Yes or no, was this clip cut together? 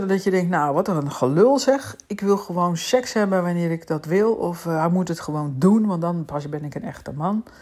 no